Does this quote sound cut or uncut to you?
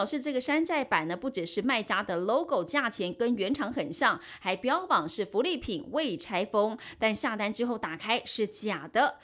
uncut